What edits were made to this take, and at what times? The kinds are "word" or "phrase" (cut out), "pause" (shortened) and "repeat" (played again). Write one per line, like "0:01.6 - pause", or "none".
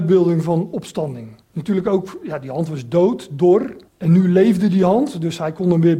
0:01.4 - pause
0:03.9 - pause